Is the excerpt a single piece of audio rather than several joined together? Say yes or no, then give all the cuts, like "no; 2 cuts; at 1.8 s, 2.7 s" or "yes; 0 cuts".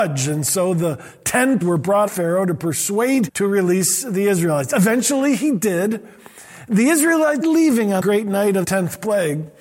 no; 6 cuts; at 1.6 s, 2.1 s, 3.3 s, 7.4 s, 8.0 s, 8.6 s